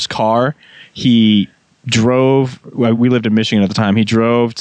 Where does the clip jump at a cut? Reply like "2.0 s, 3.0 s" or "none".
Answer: none